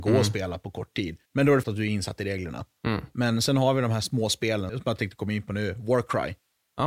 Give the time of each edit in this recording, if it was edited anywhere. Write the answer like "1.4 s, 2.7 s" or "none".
1.3 s, 1.6 s, 4.7 s